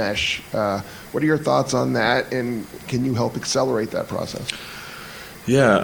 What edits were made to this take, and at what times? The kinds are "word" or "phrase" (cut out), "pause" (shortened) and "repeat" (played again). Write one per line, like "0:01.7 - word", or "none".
0:02.8 - word